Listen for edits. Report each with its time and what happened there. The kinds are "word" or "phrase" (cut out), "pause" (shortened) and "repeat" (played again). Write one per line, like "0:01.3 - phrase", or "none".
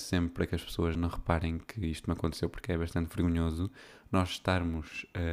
0:00.9 - word